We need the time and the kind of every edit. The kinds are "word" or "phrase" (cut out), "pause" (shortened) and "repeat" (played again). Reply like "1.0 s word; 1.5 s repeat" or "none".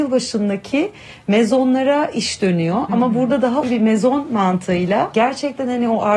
3.6 s word